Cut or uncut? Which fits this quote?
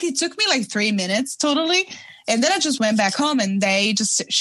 uncut